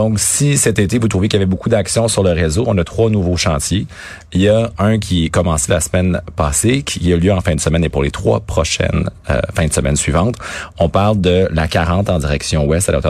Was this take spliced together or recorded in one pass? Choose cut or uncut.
uncut